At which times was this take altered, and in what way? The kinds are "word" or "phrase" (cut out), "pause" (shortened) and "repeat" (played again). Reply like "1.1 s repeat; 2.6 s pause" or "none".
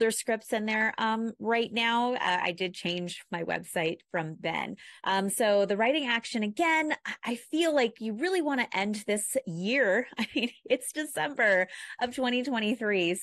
5.0 s pause